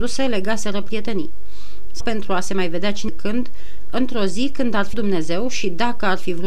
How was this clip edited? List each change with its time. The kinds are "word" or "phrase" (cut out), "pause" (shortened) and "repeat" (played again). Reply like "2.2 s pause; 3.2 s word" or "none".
2.0 s word; 3.1 s word; 4.9 s word

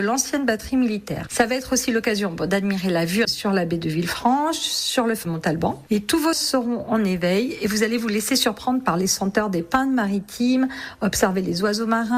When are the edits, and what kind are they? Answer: 3.2 s word; 5.2 s word; 6.3 s word

